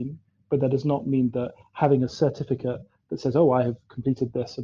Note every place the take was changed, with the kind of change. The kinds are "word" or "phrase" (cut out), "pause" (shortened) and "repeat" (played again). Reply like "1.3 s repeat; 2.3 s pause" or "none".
none

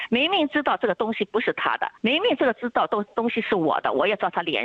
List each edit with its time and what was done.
2.0 s pause

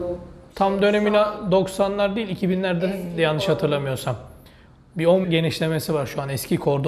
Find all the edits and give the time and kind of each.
5.2 s word

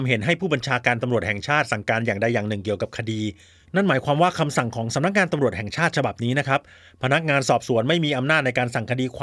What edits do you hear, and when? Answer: none

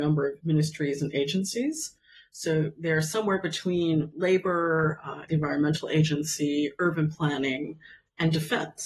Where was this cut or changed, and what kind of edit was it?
none

